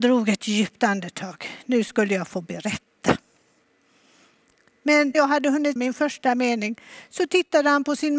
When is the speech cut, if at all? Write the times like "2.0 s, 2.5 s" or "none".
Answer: 5.1 s, 5.8 s